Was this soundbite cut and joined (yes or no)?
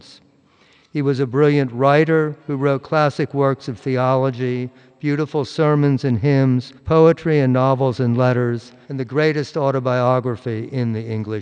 yes